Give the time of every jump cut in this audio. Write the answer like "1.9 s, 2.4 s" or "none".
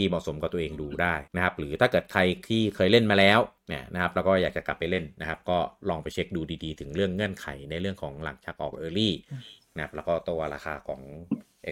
1.3 s, 3.6 s